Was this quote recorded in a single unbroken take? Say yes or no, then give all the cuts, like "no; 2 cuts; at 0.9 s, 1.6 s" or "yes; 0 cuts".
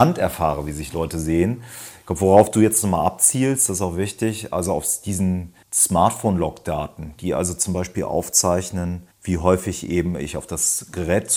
no; 2 cuts; at 5.6 s, 9.1 s